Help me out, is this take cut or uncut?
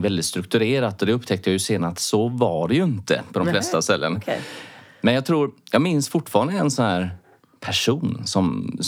uncut